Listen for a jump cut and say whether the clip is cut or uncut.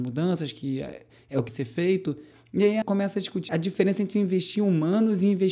cut